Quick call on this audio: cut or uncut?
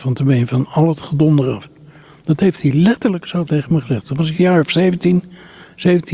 uncut